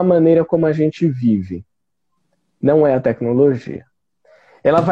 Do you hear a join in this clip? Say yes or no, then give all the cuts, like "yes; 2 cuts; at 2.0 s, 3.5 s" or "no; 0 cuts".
no; 0 cuts